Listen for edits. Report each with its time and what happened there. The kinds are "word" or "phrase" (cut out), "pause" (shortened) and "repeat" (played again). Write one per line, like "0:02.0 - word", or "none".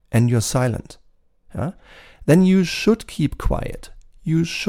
none